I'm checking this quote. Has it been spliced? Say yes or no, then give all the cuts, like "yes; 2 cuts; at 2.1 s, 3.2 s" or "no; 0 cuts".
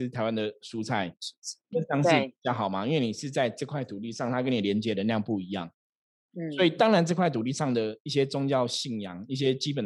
yes; 1 cut; at 1.7 s